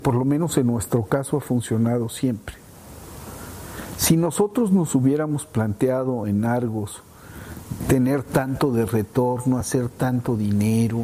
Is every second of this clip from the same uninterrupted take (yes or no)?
yes